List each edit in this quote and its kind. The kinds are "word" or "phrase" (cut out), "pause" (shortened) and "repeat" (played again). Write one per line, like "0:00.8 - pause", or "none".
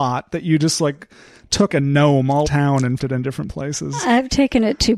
0:01.7 - word
0:02.5 - word
0:03.0 - word